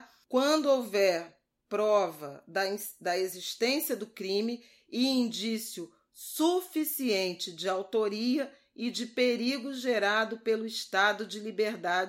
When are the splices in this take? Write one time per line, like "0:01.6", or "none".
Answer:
none